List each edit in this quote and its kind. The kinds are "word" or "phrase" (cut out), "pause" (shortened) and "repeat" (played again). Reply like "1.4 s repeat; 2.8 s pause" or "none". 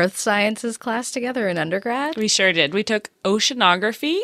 none